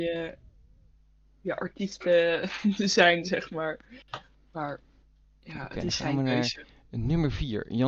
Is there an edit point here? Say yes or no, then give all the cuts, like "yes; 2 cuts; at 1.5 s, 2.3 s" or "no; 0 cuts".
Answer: no; 0 cuts